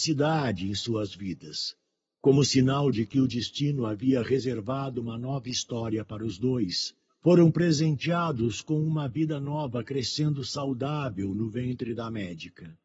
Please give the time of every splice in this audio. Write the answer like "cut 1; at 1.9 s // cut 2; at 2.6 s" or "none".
none